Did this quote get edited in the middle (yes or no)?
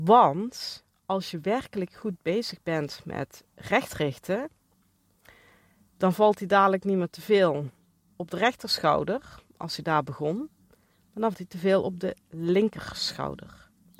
yes